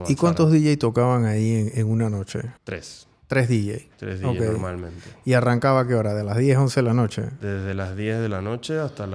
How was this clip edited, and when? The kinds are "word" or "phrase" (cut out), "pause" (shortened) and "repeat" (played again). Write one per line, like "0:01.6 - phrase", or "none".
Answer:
0:02.6 - pause